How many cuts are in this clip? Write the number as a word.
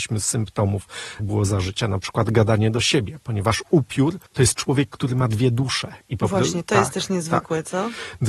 two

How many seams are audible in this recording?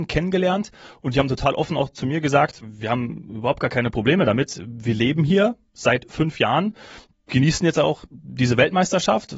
one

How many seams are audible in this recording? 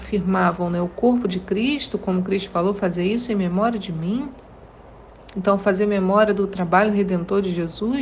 zero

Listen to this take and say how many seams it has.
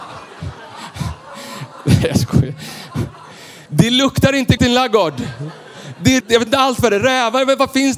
three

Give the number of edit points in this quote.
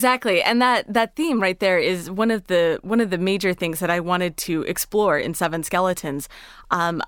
zero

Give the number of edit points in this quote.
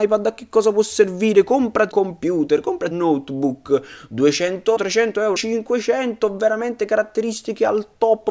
four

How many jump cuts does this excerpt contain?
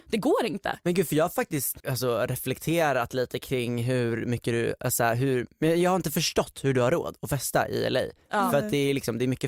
one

